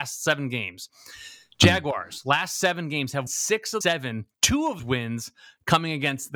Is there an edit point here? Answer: yes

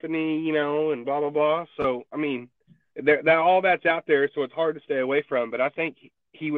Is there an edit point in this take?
no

